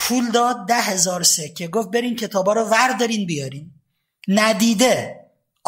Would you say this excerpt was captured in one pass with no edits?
yes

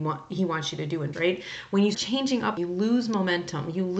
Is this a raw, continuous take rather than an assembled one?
no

